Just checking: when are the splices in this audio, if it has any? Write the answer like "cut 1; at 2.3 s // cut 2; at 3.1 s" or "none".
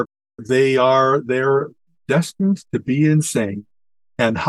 cut 1; at 2.1 s